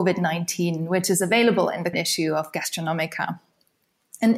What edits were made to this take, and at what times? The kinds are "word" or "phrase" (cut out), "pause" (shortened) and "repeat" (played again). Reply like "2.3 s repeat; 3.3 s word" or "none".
1.9 s word